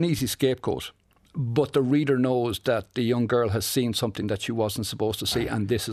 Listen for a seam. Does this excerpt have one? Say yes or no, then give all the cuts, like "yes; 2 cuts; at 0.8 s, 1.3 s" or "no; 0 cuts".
no; 0 cuts